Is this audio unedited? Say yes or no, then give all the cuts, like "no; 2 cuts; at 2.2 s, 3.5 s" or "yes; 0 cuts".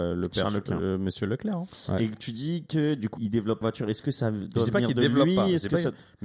no; 2 cuts; at 3.2 s, 3.6 s